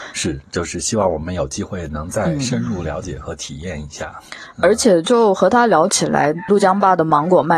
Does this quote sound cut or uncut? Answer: cut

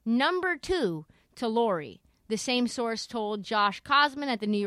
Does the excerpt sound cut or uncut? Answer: uncut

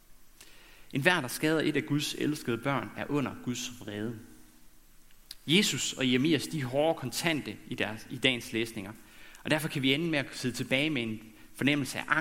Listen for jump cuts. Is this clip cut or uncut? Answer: uncut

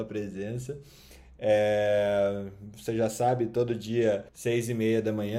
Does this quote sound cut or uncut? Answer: cut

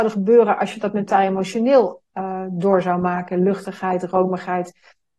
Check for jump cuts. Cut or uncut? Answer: uncut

